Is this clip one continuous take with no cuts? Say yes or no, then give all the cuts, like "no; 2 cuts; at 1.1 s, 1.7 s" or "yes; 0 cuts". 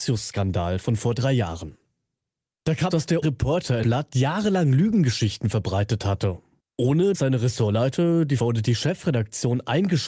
no; 5 cuts; at 2.9 s, 3.2 s, 3.8 s, 7.1 s, 8.4 s